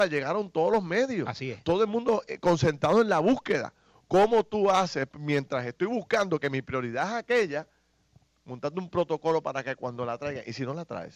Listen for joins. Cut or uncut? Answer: uncut